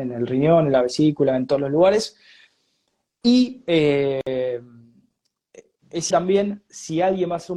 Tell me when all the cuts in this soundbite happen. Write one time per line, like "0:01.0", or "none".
0:06.1